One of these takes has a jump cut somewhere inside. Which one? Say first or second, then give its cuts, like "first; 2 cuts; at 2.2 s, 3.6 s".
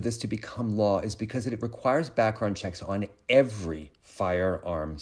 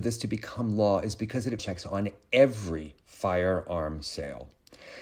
second; 1 cut; at 1.6 s